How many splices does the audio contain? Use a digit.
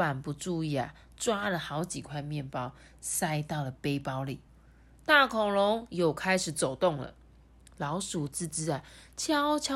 0